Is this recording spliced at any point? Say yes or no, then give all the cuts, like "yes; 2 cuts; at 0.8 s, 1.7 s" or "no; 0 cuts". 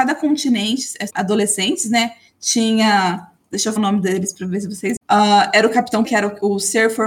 yes; 4 cuts; at 1.1 s, 3.8 s, 5.0 s, 6.0 s